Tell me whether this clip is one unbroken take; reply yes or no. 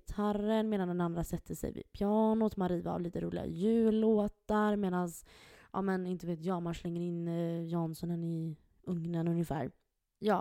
yes